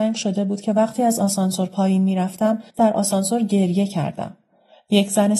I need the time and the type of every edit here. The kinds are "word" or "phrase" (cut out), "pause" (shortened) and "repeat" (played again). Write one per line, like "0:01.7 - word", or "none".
0:02.7 - pause

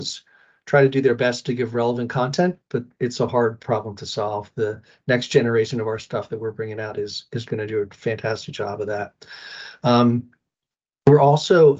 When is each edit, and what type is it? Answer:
none

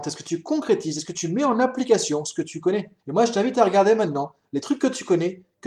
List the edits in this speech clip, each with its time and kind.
0:03.0 - pause

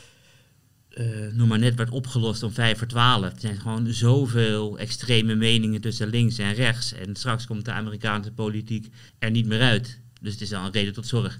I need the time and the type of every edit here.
0:09.1 - pause

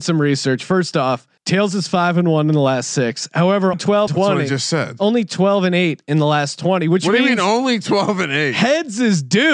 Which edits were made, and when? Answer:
0:01.4 - pause
0:03.7 - word
0:04.1 - word

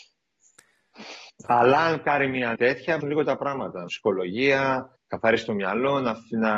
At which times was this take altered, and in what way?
0:01.3 - pause
0:02.5 - word
0:03.0 - phrase
0:03.9 - word
0:05.0 - pause

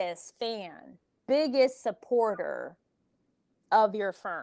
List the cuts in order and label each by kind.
0:01.2 - word

